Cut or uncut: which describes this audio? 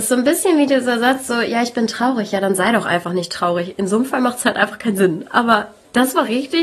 uncut